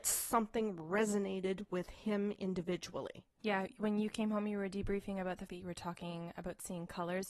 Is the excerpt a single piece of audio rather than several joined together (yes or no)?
no